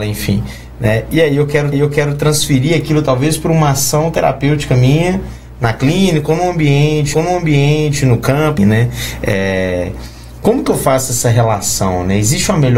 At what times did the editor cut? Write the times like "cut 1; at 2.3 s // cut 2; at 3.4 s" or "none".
cut 1; at 1.7 s // cut 2; at 7.1 s // cut 3; at 8.6 s